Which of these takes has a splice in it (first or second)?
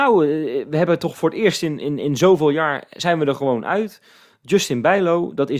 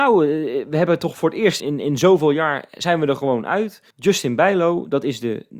second